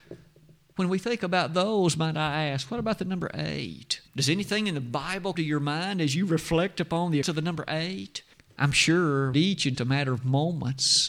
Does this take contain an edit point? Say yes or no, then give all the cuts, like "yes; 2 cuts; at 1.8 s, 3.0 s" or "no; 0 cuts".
yes; 6 cuts; at 4.1 s, 5.3 s, 7.2 s, 8.3 s, 9.3 s, 9.7 s